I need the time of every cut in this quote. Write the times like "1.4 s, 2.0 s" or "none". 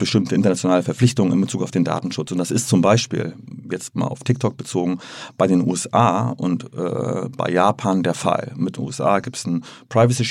none